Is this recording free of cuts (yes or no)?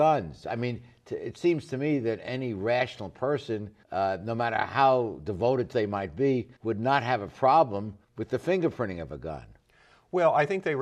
no